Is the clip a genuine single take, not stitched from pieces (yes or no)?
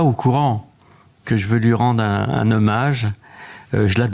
yes